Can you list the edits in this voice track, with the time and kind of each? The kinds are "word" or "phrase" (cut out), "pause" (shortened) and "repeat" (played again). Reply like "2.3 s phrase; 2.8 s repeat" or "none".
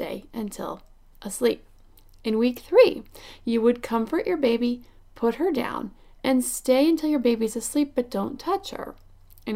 none